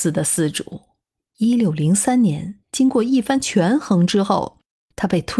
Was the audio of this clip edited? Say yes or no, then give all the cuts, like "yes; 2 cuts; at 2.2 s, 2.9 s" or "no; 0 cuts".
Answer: yes; 2 cuts; at 1.2 s, 2.6 s